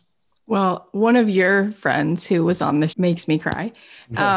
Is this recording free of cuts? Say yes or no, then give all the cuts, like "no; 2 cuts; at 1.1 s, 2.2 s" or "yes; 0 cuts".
no; 1 cut; at 2.9 s